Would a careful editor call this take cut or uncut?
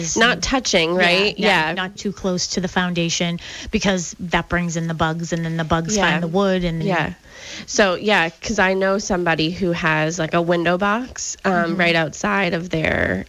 cut